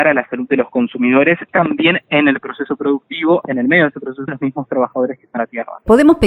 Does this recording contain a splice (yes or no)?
yes